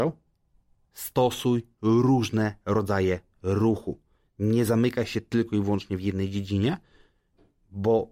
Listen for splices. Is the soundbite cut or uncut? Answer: uncut